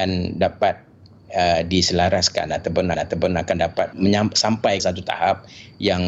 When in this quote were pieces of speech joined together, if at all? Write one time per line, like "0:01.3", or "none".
0:02.9
0:03.9
0:04.8